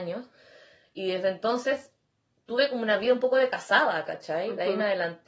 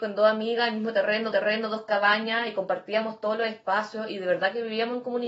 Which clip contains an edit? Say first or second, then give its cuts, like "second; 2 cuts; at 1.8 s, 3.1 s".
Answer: second; 1 cut; at 1.3 s